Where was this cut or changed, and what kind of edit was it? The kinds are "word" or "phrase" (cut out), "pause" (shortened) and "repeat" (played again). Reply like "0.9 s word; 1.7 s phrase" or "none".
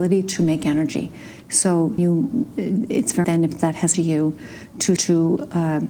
2.0 s word; 3.2 s word; 3.9 s word; 5.0 s word